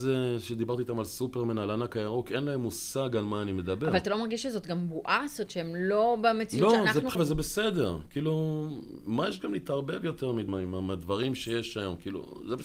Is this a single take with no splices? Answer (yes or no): no